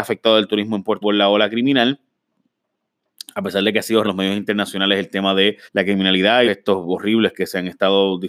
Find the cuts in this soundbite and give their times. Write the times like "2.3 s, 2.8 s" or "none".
1.0 s, 4.0 s, 5.7 s, 6.5 s